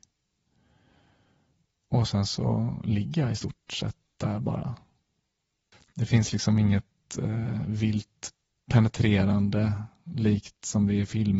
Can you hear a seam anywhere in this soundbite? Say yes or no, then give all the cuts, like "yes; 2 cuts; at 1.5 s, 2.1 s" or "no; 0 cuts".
no; 0 cuts